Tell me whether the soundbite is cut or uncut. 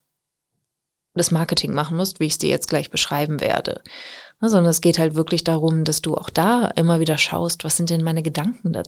uncut